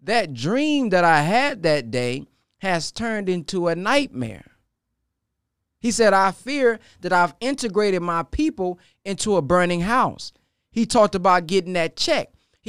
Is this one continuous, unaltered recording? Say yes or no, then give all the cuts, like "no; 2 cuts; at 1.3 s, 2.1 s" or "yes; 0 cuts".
yes; 0 cuts